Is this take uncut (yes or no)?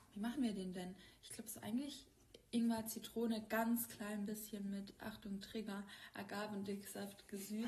yes